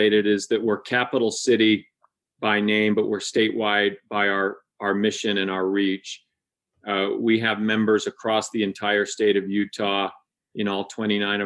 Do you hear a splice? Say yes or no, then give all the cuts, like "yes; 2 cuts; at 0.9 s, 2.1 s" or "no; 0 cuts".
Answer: no; 0 cuts